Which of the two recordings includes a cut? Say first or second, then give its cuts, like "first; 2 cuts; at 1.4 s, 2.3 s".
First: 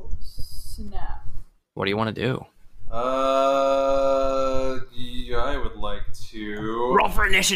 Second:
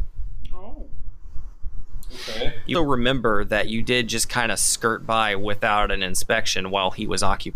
second; 1 cut; at 2.7 s